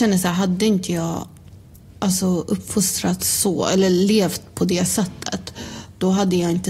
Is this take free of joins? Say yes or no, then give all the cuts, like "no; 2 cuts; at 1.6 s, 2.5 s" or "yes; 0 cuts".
yes; 0 cuts